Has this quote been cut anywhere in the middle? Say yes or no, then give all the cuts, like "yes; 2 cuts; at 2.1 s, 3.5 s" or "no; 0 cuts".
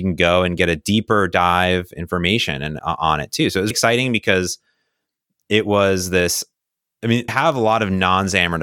yes; 3 cuts; at 2.8 s, 3.7 s, 7.3 s